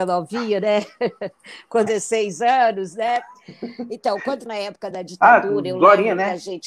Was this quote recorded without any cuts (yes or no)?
no